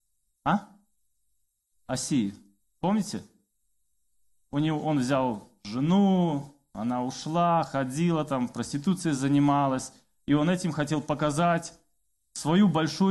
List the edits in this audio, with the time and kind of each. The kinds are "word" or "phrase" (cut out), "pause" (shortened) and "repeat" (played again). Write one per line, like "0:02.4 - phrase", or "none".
none